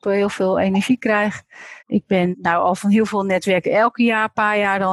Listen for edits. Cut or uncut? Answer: cut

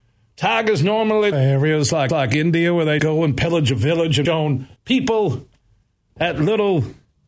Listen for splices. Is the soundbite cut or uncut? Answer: cut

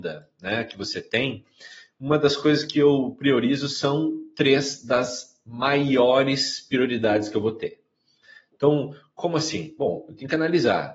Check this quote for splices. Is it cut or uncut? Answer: uncut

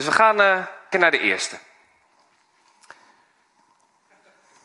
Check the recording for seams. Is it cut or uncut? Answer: cut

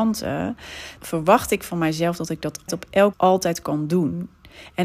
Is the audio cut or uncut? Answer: cut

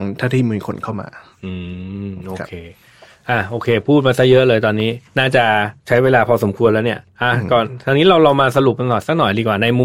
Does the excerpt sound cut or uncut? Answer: cut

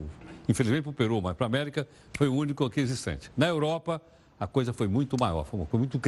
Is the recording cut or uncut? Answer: uncut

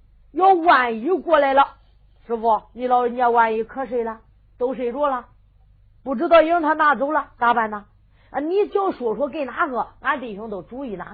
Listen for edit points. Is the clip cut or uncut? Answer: uncut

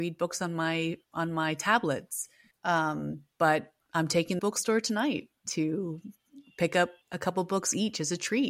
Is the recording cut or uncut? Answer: cut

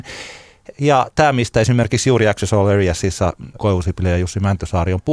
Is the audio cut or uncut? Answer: cut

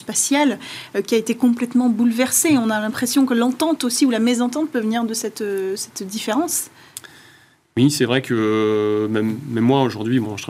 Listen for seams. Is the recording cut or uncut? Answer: uncut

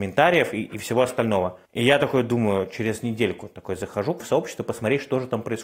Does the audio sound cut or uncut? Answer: cut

